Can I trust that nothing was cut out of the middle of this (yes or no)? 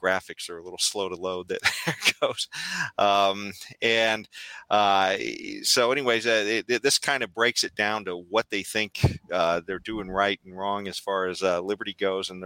yes